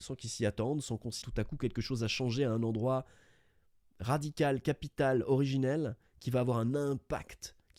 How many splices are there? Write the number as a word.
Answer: one